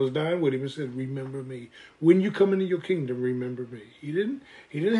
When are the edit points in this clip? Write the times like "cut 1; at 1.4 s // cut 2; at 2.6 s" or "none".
none